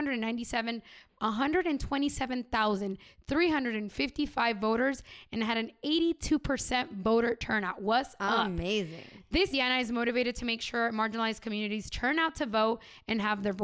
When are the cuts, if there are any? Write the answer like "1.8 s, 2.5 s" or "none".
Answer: 1.1 s, 9.5 s